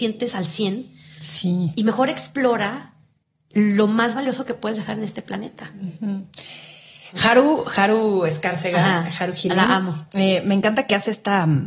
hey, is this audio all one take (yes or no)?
yes